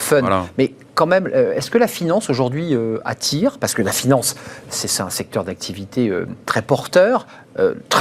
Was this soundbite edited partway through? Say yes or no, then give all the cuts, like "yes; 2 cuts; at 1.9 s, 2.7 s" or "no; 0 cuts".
no; 0 cuts